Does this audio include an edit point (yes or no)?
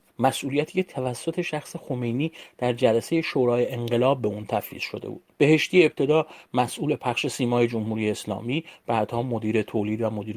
no